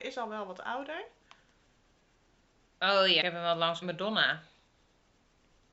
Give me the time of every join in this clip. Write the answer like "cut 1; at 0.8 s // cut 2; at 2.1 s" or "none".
cut 1; at 3.2 s // cut 2; at 3.8 s